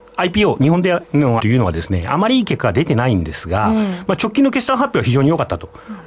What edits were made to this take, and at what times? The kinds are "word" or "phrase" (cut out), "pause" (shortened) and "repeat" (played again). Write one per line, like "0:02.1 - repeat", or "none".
0:01.4 - word